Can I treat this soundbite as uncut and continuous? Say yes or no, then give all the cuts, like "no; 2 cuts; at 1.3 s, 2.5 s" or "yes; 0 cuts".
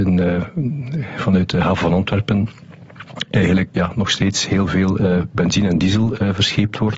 no; 1 cut; at 3.7 s